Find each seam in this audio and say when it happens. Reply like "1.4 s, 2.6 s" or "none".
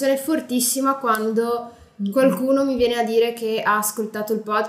none

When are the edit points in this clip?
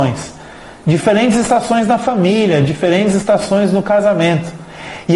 none

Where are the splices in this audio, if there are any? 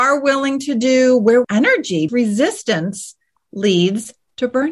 1.4 s, 2.1 s

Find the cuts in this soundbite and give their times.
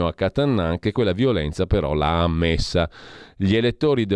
none

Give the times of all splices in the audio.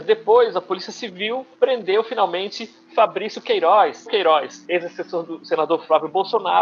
1.5 s, 4.1 s, 4.6 s

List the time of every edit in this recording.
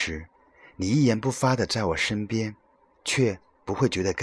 2.7 s

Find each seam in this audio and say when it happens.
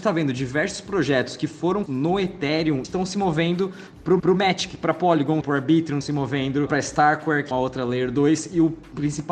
1.9 s, 2.8 s, 4.2 s, 5.4 s, 6.0 s, 6.7 s, 7.5 s

